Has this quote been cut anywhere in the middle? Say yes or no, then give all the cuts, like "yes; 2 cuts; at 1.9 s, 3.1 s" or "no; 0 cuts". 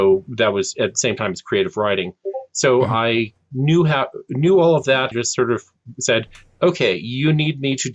yes; 1 cut; at 5.1 s